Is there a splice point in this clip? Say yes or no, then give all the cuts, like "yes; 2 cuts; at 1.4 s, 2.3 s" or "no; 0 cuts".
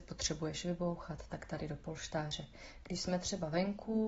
no; 0 cuts